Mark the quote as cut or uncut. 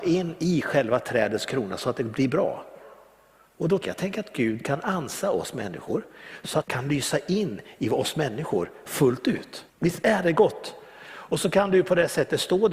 cut